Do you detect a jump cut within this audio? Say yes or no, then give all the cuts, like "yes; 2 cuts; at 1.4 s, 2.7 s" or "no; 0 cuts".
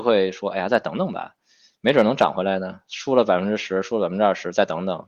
no; 0 cuts